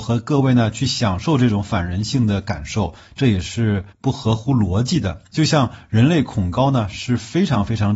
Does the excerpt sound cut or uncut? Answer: cut